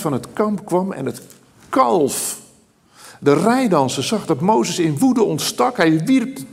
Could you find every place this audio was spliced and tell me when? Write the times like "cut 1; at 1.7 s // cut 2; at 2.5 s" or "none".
none